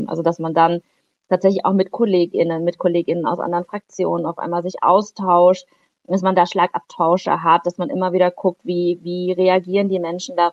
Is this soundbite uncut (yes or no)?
yes